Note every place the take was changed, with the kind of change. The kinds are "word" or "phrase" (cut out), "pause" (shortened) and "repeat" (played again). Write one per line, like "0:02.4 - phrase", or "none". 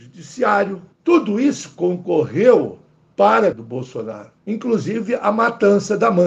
0:00.9 - pause
0:02.9 - pause
0:03.5 - word
0:04.4 - pause